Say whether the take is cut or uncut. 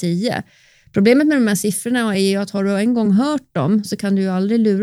uncut